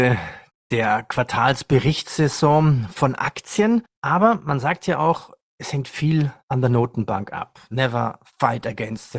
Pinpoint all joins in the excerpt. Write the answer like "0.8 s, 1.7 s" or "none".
6.4 s

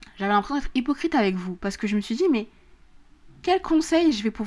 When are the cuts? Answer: none

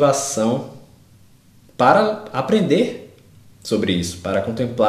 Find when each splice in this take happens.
none

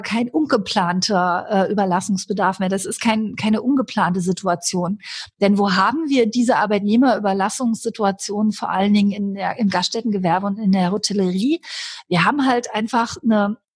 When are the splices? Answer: none

